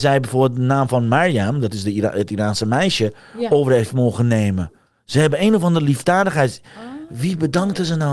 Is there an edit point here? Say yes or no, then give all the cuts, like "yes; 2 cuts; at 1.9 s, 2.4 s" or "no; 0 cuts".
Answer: no; 0 cuts